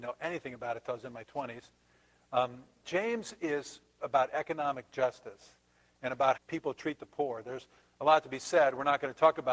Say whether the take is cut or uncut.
cut